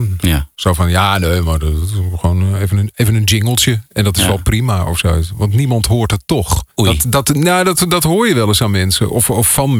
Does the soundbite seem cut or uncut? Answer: cut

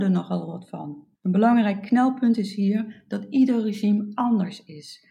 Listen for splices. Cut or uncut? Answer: cut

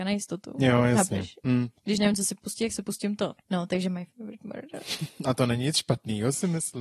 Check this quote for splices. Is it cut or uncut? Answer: cut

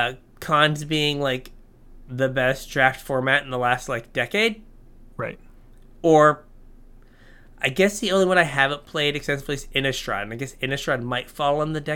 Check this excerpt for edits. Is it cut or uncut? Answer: uncut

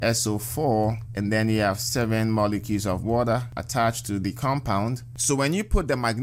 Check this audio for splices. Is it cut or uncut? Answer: uncut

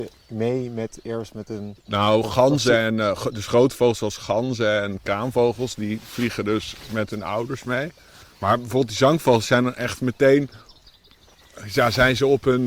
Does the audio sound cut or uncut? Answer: uncut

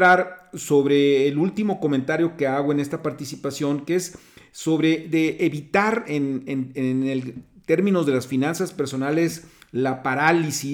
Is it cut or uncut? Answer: uncut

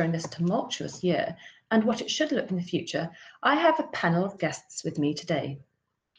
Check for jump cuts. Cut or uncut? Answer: cut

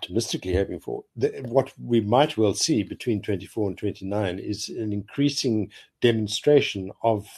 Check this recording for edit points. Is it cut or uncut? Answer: uncut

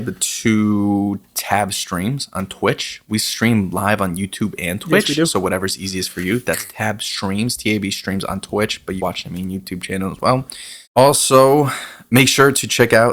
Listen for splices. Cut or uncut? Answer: cut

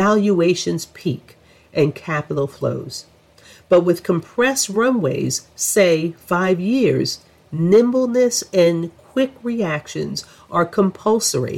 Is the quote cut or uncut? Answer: uncut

